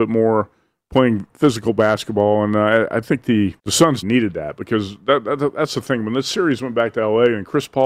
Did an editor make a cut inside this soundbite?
yes; 3 cuts; at 1.3 s, 3.6 s, 4.0 s

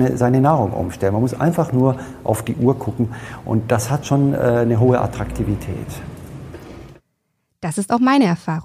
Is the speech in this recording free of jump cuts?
yes; 0 cuts

